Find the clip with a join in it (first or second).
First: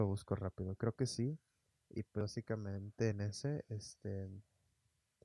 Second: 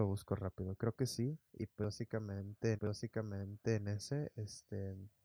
second